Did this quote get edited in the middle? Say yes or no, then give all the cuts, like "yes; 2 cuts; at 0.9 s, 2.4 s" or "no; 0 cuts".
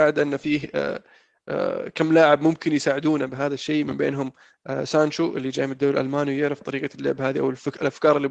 no; 0 cuts